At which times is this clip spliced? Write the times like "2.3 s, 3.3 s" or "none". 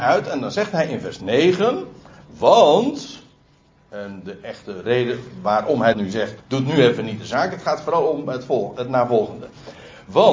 5.9 s, 6.4 s